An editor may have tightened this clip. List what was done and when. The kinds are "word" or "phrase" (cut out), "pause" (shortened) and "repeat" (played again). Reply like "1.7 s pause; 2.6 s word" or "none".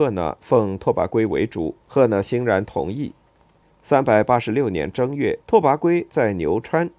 1.8 s pause; 3.6 s pause; 5.4 s pause